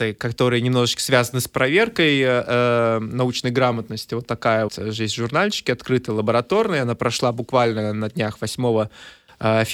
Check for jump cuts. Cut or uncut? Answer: cut